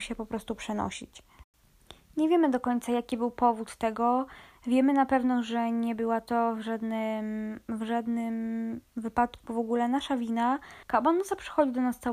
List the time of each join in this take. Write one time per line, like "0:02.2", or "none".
0:10.8